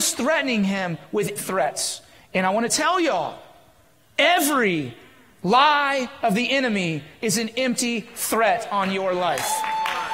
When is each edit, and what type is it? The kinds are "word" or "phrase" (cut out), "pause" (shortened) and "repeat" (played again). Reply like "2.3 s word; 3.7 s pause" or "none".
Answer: 1.4 s word